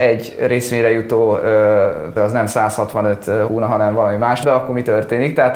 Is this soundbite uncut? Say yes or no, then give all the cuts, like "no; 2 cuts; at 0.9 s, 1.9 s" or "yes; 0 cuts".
no; 3 cuts; at 2.2 s, 3.5 s, 4.4 s